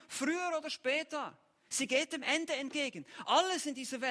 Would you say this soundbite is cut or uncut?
uncut